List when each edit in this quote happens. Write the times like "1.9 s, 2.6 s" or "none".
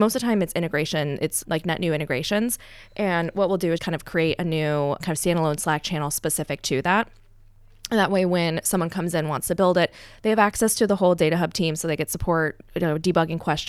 1.4 s, 3.8 s, 5.0 s